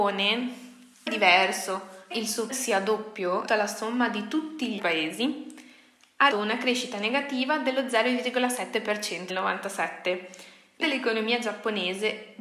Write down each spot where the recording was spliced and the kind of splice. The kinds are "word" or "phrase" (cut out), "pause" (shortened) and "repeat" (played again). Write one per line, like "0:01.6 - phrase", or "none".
0:01.1 - word
0:02.1 - word
0:02.5 - word
0:03.5 - word
0:04.8 - word
0:06.3 - word
0:09.3 - word
0:10.8 - word